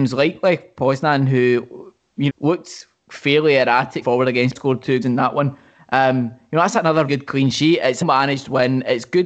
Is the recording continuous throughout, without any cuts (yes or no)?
no